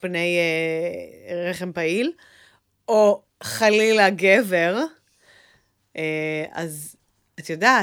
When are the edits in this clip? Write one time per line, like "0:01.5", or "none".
0:03.3

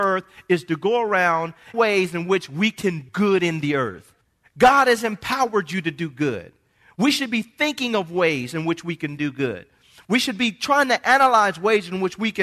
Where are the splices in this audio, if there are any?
0:01.7
0:03.1
0:04.2

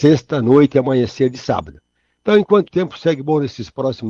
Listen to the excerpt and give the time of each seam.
0:02.7

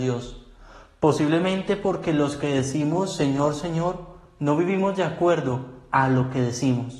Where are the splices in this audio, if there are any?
none

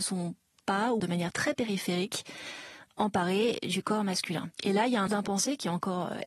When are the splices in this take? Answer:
0:01.0
0:04.5
0:05.1

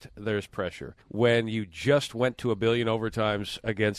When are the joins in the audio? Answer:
0:01.0

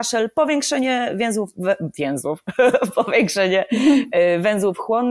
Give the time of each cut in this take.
none

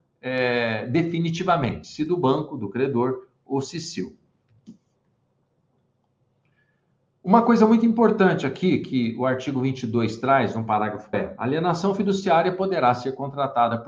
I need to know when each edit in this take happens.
0:11.1

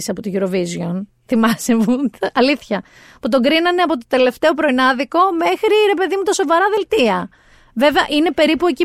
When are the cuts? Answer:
none

